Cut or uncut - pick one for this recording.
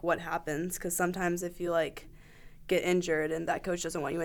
uncut